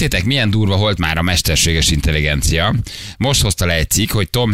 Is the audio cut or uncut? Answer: cut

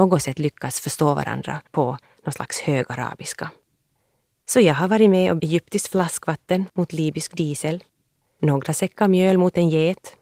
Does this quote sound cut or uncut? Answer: cut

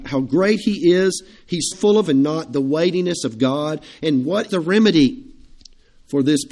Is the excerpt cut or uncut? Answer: cut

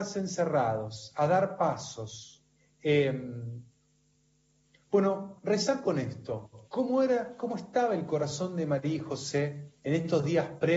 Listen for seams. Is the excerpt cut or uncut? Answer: cut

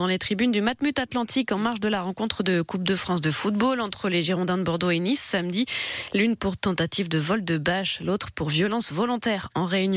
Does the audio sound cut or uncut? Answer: uncut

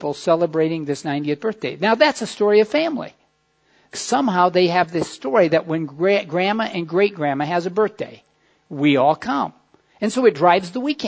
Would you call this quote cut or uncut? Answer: cut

